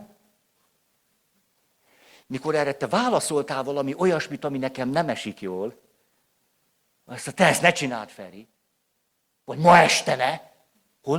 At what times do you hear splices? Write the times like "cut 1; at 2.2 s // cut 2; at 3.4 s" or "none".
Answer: none